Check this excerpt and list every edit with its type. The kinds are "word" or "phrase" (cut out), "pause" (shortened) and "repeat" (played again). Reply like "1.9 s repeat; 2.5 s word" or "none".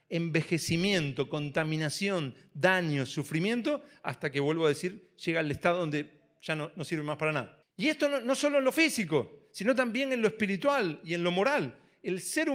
7.6 s pause